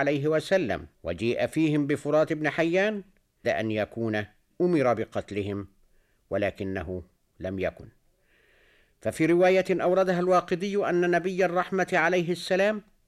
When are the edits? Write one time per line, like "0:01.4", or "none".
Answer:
0:00.9
0:03.4
0:04.5